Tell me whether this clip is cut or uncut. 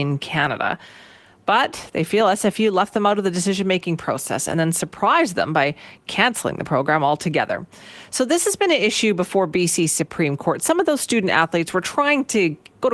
uncut